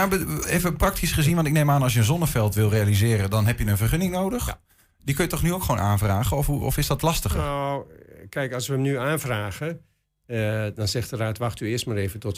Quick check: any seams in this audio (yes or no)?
no